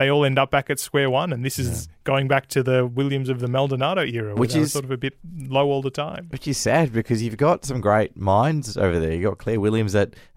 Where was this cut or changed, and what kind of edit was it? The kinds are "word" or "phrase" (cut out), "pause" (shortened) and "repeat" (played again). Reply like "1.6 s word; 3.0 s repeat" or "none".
none